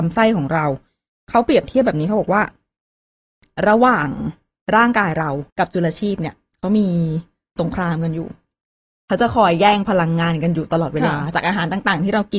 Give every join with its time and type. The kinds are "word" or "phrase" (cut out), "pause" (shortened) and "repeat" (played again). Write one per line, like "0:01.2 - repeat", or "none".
0:05.5 - pause

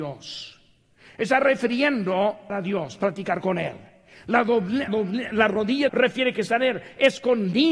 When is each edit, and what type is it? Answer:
0:02.5 - word
0:04.9 - word
0:05.9 - word

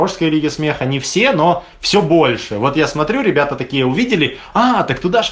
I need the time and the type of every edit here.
none

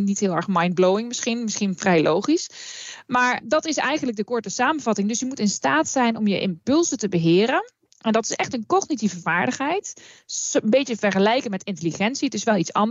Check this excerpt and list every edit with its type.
none

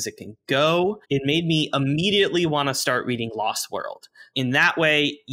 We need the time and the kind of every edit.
0:01.0 - pause
0:04.3 - word

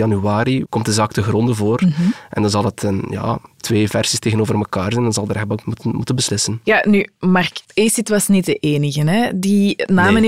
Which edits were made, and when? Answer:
0:05.6 - word
0:07.6 - pause

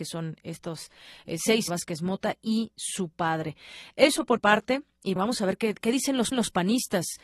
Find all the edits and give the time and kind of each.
0:01.7 - phrase
0:04.4 - word
0:05.2 - word
0:06.3 - repeat

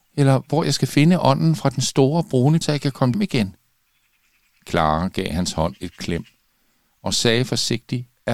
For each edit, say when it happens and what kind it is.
0:02.6 - word
0:03.1 - word

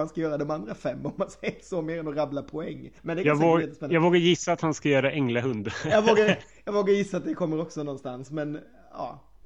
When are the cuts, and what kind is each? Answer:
0:03.0 - pause

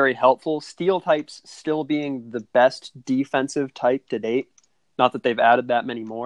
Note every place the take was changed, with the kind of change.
none

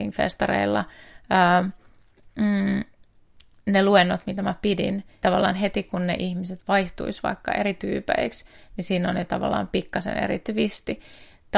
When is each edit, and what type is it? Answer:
0:05.2 - word

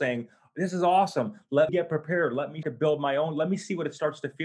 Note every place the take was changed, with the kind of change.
0:01.7 - word
0:02.6 - word

